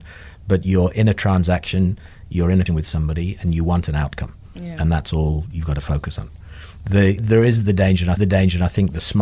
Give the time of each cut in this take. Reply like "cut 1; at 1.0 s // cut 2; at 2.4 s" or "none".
cut 1; at 2.7 s // cut 2; at 7.2 s // cut 3; at 8.2 s